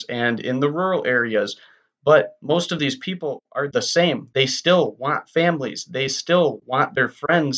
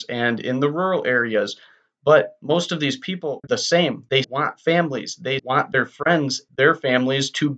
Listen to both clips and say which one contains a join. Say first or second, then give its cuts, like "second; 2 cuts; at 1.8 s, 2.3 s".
second; 4 cuts; at 3.4 s, 4.2 s, 5.4 s, 6.5 s